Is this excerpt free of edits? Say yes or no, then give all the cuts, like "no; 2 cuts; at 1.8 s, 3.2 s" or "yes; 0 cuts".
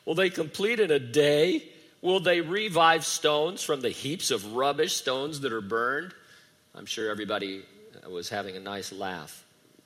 yes; 0 cuts